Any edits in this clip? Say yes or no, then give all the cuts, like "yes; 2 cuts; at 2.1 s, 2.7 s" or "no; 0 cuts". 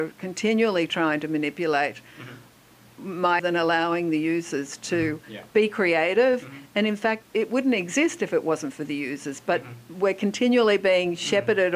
yes; 2 cuts; at 3.4 s, 7.2 s